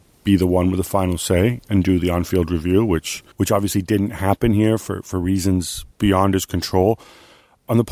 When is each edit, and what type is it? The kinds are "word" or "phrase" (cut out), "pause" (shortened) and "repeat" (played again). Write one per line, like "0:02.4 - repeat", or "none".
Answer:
0:03.3 - pause
0:05.9 - pause